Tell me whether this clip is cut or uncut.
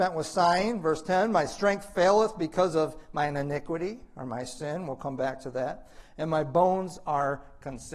uncut